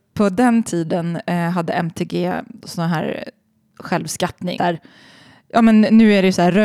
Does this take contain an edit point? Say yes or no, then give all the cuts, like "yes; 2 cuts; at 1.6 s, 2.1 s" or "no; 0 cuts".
yes; 1 cut; at 4.6 s